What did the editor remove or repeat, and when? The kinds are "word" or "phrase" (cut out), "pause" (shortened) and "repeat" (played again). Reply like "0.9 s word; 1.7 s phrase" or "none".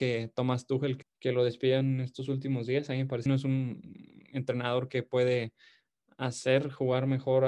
1.0 s word; 3.3 s phrase